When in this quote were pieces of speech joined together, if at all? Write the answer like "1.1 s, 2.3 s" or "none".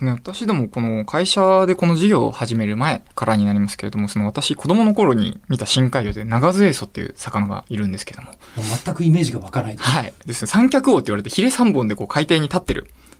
3.1 s